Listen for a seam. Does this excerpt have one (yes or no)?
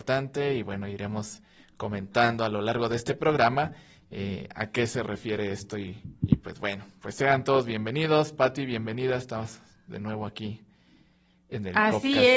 no